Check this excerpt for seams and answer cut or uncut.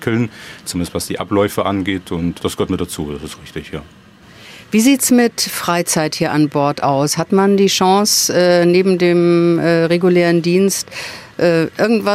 uncut